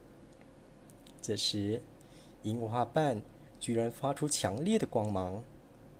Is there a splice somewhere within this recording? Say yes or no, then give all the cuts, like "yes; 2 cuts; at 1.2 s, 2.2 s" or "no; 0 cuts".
yes; 1 cut; at 1.2 s